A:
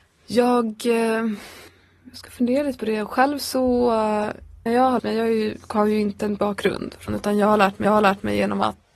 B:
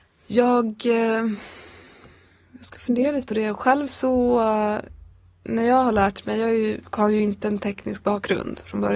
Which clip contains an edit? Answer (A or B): A